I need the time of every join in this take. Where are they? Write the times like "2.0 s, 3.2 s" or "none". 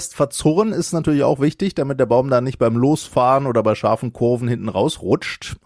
none